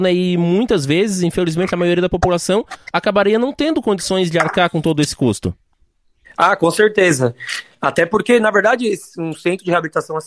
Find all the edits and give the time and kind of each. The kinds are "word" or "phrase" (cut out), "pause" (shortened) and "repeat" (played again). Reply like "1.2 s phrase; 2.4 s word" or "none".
none